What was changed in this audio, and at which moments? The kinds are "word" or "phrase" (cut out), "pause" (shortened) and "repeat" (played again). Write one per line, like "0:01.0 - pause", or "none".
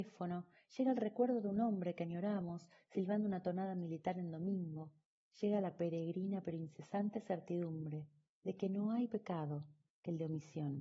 0:09.1 - word